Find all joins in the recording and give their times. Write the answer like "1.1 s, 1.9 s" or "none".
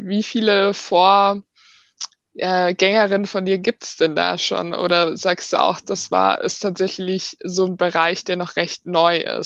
none